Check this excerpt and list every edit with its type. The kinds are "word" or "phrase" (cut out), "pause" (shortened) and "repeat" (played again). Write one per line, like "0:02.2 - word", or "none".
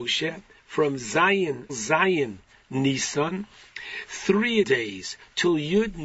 0:01.7 - phrase
0:02.5 - pause
0:04.6 - word